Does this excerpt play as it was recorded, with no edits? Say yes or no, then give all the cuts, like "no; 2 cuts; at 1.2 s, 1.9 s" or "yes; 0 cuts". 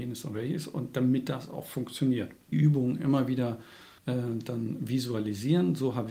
no; 2 cuts; at 2.5 s, 4.0 s